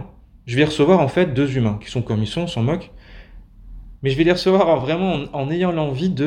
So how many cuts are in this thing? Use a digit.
0